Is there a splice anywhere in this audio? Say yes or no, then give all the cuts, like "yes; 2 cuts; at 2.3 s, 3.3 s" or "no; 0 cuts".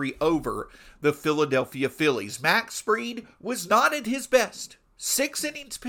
no; 0 cuts